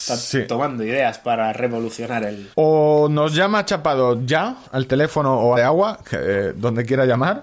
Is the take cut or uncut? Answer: cut